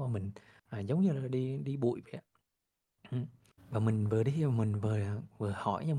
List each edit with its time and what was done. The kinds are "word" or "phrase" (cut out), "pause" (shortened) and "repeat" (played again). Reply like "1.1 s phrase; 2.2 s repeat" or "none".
1.3 s word

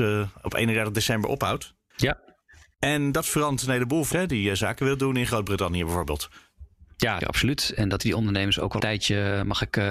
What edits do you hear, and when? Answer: 4.1 s word; 7.2 s word; 8.0 s word; 8.8 s word

